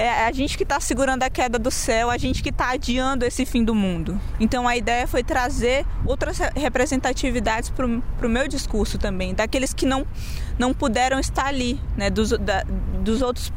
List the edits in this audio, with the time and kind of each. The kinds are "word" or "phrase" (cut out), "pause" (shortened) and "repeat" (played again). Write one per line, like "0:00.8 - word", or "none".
none